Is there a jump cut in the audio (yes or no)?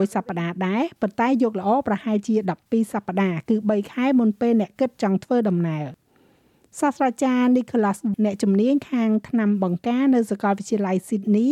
yes